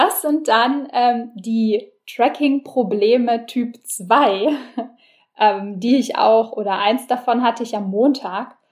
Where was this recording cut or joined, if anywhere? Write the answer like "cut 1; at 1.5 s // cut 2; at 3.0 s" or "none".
none